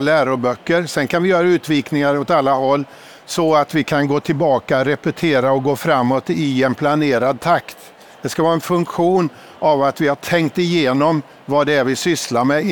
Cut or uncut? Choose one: uncut